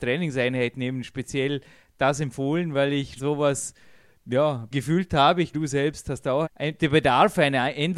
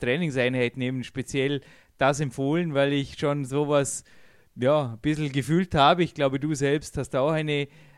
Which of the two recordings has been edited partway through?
first; 4 cuts; at 3.2 s, 4.7 s, 5.5 s, 6.4 s

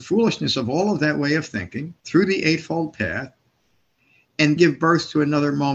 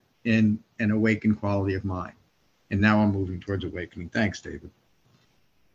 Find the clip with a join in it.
first; 2 cuts; at 2.0 s, 4.6 s

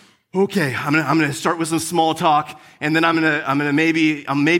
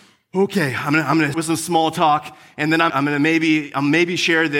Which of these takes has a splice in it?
second; 2 cuts; at 1.3 s, 2.9 s

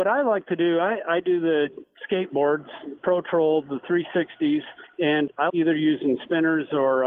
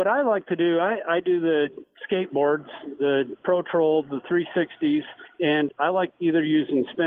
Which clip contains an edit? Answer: first; 2 cuts; at 3.0 s, 5.5 s

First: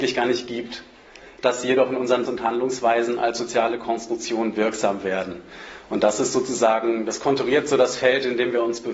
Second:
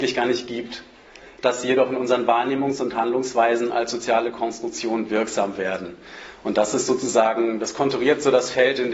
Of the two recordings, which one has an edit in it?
first; 1 cut; at 2.3 s

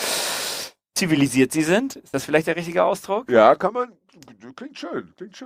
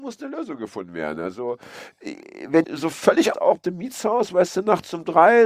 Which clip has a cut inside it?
second; 3 cuts; at 2.6 s, 3.3 s, 3.6 s

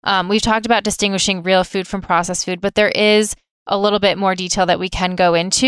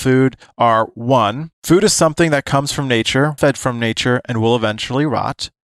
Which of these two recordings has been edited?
second; 2 cuts; at 1.5 s, 3.4 s

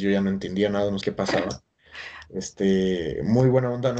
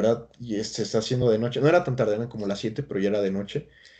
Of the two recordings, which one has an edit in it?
first; 1 cut; at 1.0 s

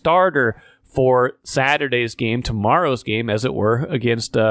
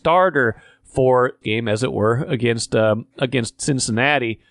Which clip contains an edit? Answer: second; 1 cut; at 1.4 s

